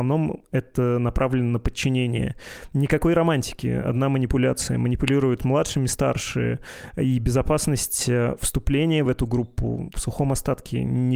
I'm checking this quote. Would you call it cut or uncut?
uncut